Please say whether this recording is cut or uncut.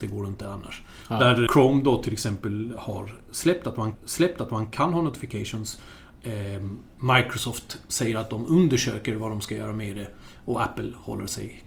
cut